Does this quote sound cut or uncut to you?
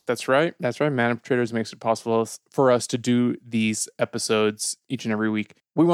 uncut